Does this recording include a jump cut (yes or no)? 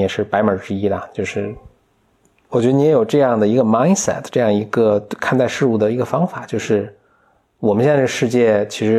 no